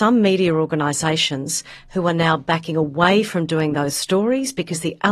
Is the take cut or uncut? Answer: uncut